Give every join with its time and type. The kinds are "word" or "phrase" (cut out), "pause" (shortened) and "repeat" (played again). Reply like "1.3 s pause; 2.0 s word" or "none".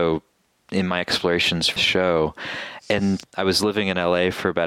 1.8 s word